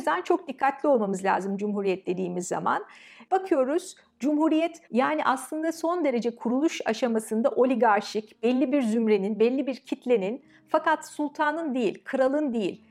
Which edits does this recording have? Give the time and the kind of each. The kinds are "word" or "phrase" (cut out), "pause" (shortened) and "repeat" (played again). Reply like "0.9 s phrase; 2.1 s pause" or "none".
4.9 s pause